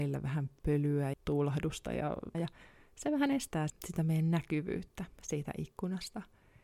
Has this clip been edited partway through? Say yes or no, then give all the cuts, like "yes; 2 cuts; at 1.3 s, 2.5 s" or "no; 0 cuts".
yes; 3 cuts; at 1.1 s, 2.3 s, 3.7 s